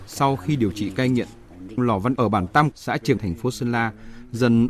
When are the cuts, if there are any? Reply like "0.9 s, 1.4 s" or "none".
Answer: 1.8 s, 2.2 s, 2.7 s, 3.2 s